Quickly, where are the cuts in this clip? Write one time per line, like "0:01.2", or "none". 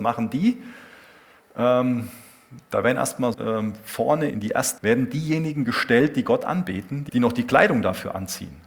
0:03.3
0:04.3
0:04.8
0:07.1

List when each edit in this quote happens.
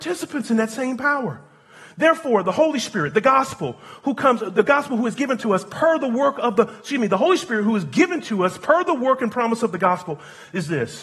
none

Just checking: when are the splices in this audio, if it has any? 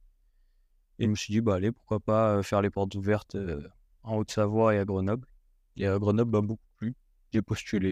0:01.0

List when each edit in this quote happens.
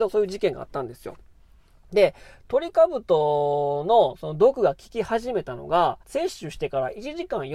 0:06.0

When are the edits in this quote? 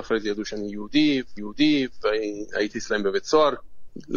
0:01.4

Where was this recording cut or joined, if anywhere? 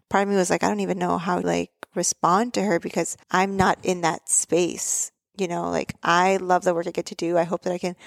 0:01.4
0:03.2

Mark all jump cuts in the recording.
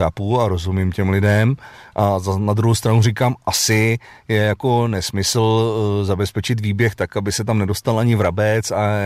none

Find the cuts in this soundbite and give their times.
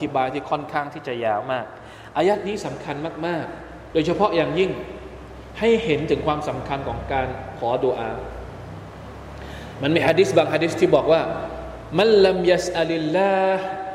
0:03.9

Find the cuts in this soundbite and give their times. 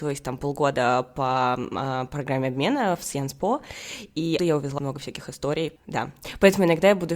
0:04.4
0:04.8

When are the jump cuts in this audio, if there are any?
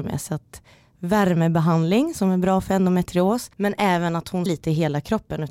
0:03.5
0:04.5

